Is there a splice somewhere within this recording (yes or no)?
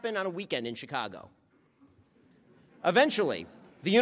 no